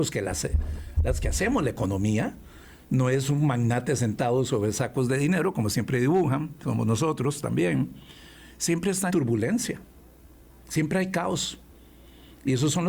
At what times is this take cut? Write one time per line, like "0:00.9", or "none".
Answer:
0:09.1